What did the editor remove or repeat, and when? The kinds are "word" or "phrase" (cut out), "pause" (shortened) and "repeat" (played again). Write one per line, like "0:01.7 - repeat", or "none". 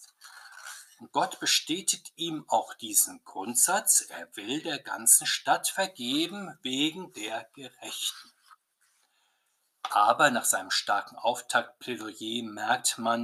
none